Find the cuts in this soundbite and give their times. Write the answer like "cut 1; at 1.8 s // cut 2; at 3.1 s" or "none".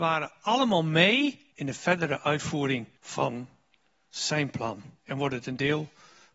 cut 1; at 1.5 s // cut 2; at 3.0 s // cut 3; at 5.0 s